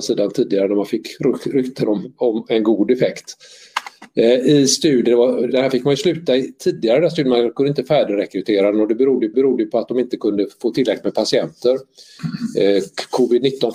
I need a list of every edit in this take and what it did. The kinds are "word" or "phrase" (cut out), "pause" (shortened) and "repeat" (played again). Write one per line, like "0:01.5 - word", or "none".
0:05.5 - word
0:09.3 - repeat